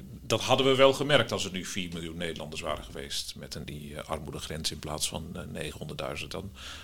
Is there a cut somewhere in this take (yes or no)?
yes